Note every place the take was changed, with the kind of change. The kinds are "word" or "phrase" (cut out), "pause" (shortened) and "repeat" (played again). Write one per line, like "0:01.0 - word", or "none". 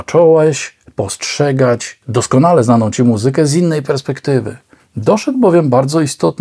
0:04.8 - pause